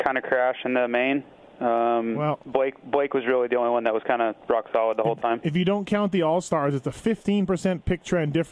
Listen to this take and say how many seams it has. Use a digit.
0